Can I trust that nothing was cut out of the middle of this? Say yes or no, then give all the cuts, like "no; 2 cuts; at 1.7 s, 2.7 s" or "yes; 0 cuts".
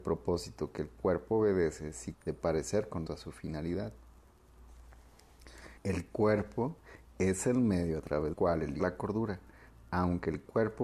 no; 5 cuts; at 2.1 s, 3.1 s, 5.8 s, 8.3 s, 8.8 s